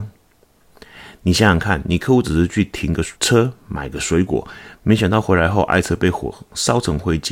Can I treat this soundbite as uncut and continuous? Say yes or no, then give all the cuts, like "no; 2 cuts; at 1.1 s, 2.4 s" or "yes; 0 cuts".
no; 1 cut; at 3.2 s